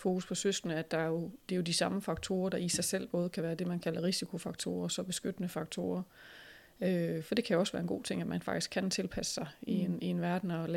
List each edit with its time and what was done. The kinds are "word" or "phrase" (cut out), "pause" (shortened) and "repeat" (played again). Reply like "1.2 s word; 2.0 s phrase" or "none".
none

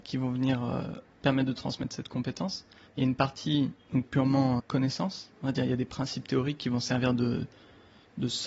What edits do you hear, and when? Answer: 1.1 s pause; 2.9 s pause; 4.0 s phrase; 4.6 s word

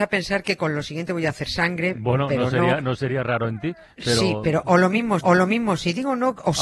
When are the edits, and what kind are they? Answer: 5.2 s repeat

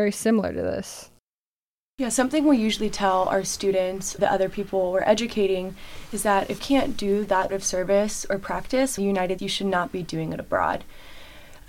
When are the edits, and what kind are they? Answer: 4.2 s word; 6.6 s word; 7.5 s word; 9.0 s word; 9.4 s word

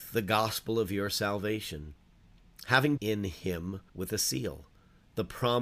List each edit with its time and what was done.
3.0 s phrase; 3.9 s pause

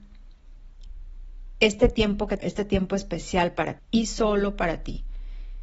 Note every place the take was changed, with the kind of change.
2.4 s word; 3.8 s word

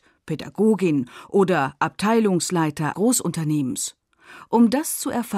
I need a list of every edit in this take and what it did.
2.9 s word

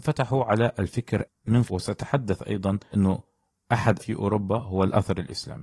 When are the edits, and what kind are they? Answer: 1.2 s word; 1.7 s phrase; 2.9 s word; 4.0 s phrase

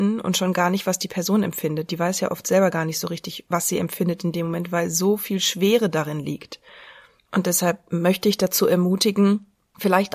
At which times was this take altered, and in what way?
none

